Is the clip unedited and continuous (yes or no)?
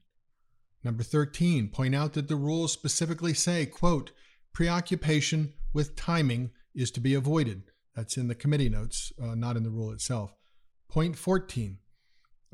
yes